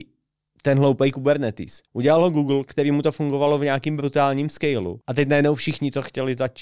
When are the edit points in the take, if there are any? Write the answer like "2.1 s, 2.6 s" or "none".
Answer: 1.9 s, 5.0 s